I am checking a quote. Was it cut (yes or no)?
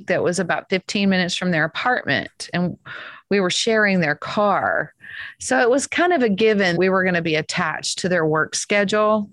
yes